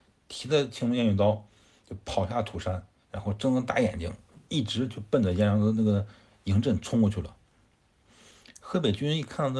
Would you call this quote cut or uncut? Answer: cut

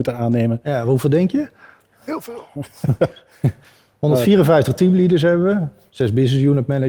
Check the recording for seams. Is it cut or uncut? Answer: uncut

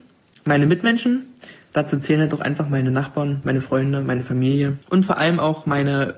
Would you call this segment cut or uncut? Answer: cut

